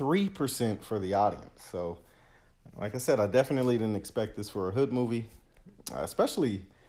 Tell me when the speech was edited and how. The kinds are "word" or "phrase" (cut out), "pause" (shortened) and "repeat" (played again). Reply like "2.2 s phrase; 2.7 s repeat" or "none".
none

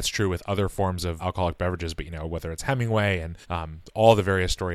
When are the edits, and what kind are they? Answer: 1.2 s word; 3.4 s pause

